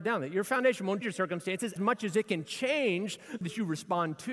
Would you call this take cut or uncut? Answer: cut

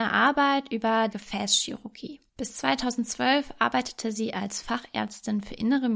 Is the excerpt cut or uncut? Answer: cut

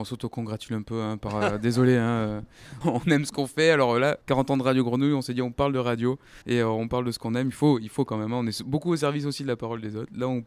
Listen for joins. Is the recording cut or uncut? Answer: cut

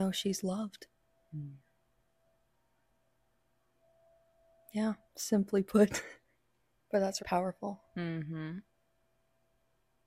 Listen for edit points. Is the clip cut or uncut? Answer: cut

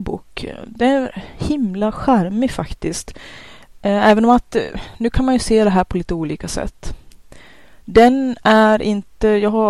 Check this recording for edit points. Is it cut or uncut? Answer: uncut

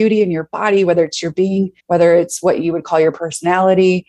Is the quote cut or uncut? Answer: cut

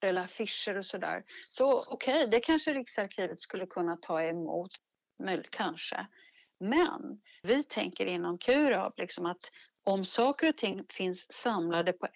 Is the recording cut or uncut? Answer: uncut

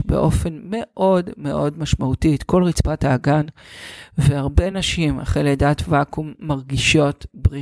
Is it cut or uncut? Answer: uncut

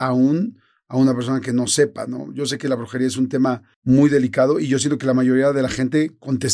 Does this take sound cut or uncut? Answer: cut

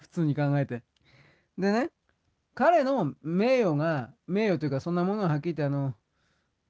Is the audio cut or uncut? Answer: cut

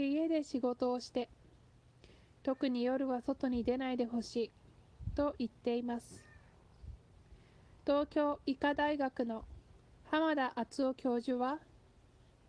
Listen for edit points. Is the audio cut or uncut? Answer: uncut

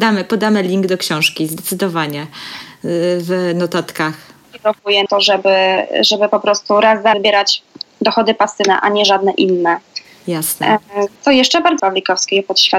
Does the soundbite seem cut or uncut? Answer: cut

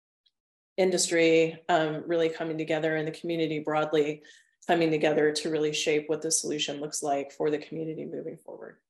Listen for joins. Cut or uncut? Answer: uncut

